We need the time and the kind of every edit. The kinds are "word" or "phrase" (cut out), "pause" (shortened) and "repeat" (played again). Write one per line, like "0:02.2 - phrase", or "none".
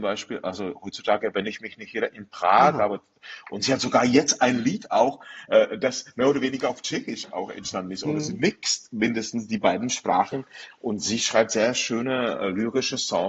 none